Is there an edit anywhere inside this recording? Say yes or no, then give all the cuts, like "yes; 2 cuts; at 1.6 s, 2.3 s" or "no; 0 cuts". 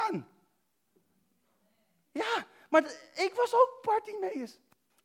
no; 0 cuts